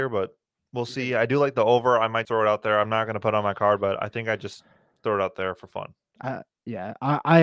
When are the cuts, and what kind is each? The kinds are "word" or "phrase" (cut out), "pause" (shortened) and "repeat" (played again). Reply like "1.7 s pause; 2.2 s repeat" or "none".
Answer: 2.2 s word